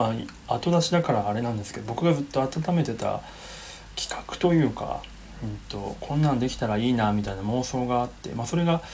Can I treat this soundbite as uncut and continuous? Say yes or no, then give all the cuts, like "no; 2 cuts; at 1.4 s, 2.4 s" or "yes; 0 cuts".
yes; 0 cuts